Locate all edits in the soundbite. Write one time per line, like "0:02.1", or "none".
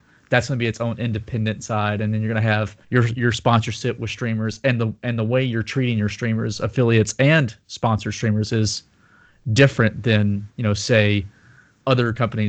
0:02.8
0:10.5